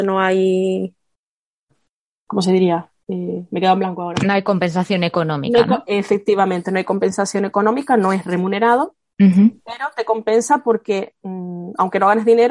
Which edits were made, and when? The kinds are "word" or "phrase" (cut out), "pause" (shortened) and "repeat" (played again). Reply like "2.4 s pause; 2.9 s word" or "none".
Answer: none